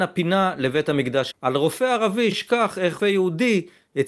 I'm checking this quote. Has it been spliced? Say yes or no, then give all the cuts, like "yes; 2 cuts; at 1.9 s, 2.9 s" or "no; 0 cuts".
yes; 3 cuts; at 1.3 s, 2.3 s, 3.0 s